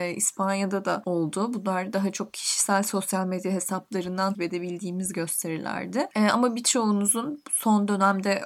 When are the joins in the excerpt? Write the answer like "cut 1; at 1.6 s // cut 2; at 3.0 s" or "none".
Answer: cut 1; at 4.3 s